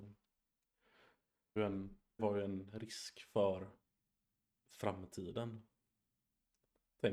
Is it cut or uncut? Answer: cut